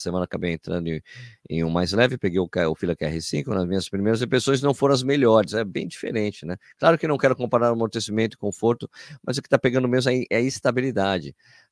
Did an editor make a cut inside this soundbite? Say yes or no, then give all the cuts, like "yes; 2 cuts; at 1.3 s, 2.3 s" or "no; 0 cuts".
yes; 1 cut; at 10.3 s